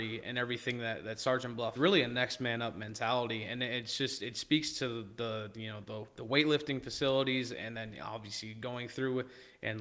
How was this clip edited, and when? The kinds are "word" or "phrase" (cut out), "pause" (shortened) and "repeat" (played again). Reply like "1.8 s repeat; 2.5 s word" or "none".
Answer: 1.8 s phrase

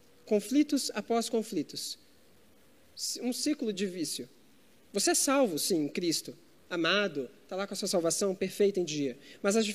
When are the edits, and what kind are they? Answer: none

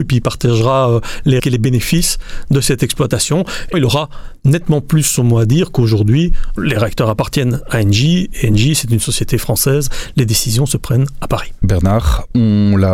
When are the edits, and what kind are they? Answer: 1.4 s word; 3.7 s word; 6.6 s word

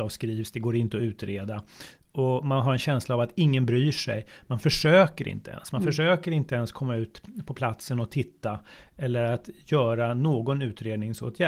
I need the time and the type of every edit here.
none

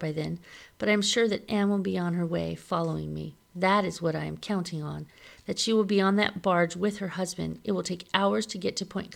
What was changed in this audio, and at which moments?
3.4 s pause

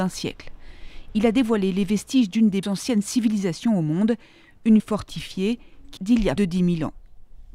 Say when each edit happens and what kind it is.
2.6 s word; 4.8 s word; 6.0 s word; 6.4 s word

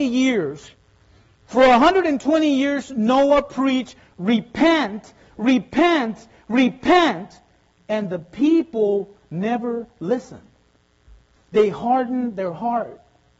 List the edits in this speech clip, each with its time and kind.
none

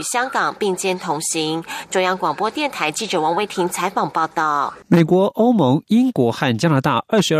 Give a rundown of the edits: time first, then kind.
4.8 s pause

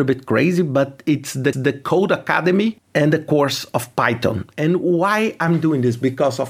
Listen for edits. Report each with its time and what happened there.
1.5 s repeat

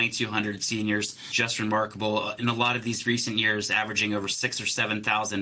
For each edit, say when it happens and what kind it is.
none

